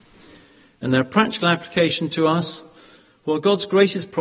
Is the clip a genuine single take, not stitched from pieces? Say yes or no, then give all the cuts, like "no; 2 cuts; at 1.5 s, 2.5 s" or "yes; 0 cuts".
yes; 0 cuts